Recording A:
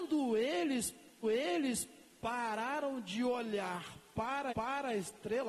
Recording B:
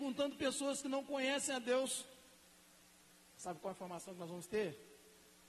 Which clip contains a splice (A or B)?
A